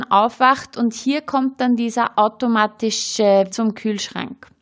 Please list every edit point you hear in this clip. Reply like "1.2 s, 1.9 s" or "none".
3.5 s